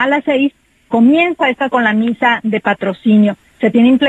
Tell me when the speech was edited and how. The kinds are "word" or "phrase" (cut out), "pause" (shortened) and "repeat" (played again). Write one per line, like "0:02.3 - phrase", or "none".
0:01.7 - word